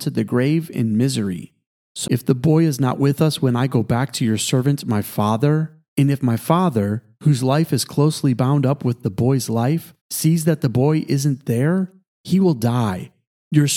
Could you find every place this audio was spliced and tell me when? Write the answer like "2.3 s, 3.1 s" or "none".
2.1 s, 10.0 s